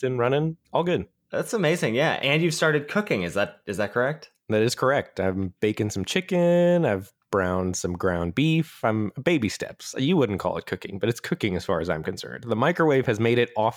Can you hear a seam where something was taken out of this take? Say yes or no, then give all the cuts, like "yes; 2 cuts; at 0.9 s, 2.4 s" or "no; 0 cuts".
no; 0 cuts